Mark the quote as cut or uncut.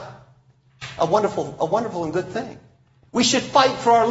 uncut